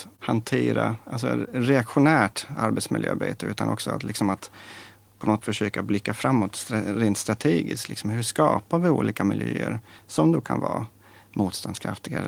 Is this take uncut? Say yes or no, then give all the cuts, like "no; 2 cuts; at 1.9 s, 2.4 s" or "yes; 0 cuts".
no; 1 cut; at 5.4 s